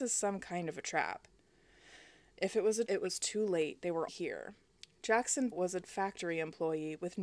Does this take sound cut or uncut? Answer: cut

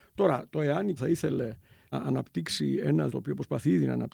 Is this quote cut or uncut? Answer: cut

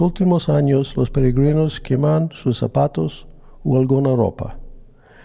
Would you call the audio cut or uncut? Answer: uncut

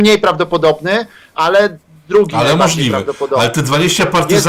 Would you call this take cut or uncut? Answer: uncut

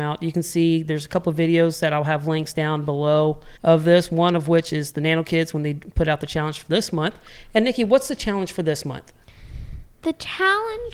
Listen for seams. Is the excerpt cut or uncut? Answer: cut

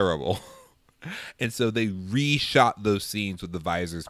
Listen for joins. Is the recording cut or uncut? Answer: uncut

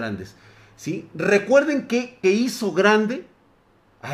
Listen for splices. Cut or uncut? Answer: cut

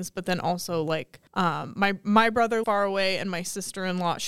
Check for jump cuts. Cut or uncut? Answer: cut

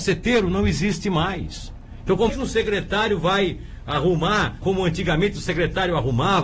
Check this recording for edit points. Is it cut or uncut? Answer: cut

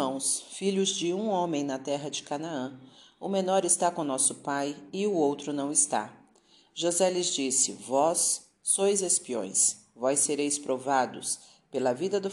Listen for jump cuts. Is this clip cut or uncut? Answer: uncut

